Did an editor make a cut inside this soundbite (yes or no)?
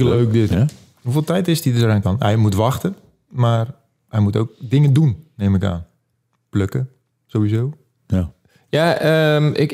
yes